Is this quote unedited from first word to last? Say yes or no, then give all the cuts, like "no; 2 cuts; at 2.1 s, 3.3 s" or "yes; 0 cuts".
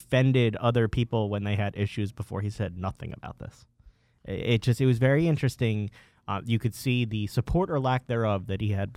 yes; 0 cuts